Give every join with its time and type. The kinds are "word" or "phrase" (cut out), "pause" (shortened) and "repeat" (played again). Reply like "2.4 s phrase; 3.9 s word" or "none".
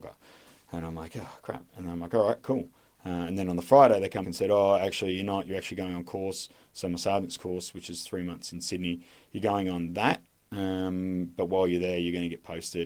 4.2 s word

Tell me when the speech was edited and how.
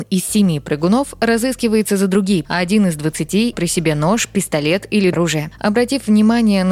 2.4 s word; 3.5 s word; 5.1 s word

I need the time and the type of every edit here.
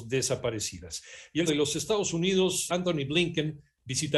1.5 s word; 2.7 s word

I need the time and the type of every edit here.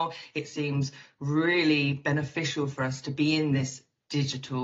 none

